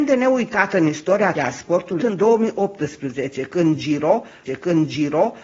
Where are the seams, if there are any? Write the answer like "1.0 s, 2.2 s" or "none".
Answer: 1.3 s, 2.0 s, 4.4 s